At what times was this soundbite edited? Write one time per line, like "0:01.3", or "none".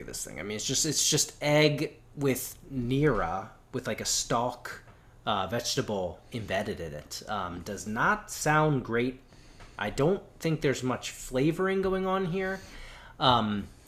none